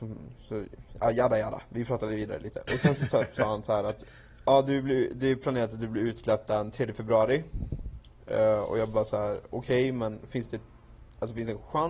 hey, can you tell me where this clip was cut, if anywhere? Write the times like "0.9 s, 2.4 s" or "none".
none

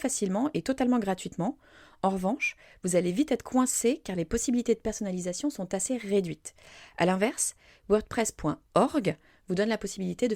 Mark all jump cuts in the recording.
none

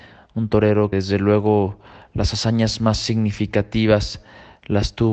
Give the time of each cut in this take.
0.9 s

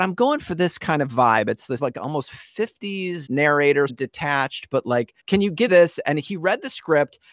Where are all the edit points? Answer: 1.8 s, 3.3 s, 3.9 s, 5.2 s, 5.7 s

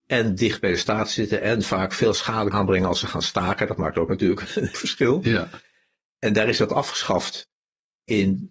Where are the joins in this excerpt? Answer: 2.5 s, 4.7 s

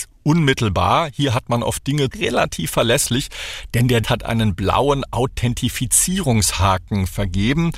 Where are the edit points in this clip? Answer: 2.1 s, 4.0 s

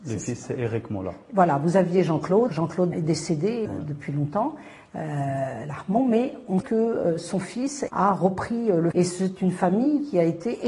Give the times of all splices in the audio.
2.5 s, 2.9 s, 3.7 s, 6.6 s, 7.9 s, 8.9 s

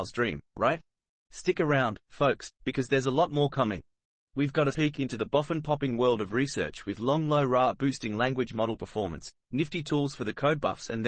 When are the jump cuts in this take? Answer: 4.7 s

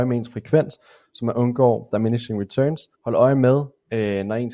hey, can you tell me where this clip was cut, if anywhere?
2.9 s

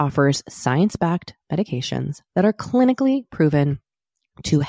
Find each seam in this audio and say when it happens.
none

